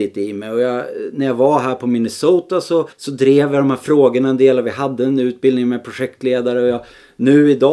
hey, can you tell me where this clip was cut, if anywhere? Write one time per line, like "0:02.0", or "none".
0:02.9